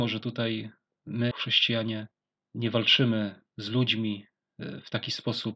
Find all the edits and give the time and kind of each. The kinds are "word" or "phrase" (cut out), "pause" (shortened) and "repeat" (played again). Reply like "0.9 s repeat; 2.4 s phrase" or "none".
1.3 s word; 3.5 s pause

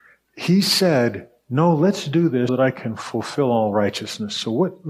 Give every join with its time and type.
2.5 s word

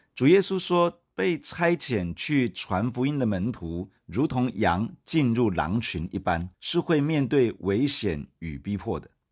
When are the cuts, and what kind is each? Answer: 4.0 s pause; 6.5 s pause

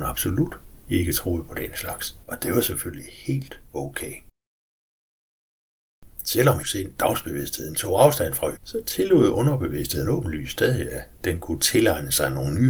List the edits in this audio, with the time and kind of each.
2.2 s pause; 6.6 s phrase; 8.6 s word

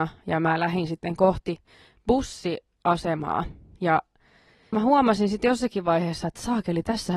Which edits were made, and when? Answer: 4.7 s phrase

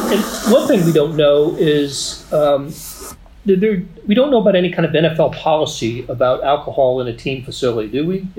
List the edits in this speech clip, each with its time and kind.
none

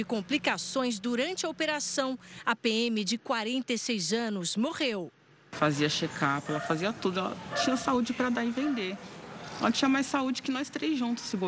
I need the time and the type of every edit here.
none

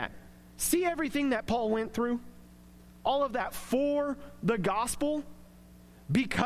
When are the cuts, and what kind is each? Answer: none

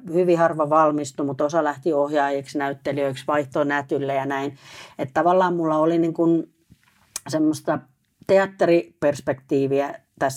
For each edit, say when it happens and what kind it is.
none

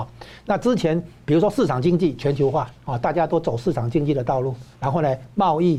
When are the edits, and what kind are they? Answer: 2.7 s pause; 4.7 s pause

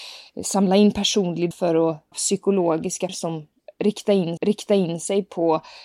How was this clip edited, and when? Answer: 1.5 s word; 2.1 s word; 3.1 s word; 4.4 s repeat

